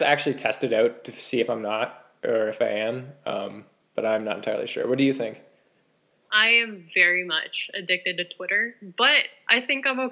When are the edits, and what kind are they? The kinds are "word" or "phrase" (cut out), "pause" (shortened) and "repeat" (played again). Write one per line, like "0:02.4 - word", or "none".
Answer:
none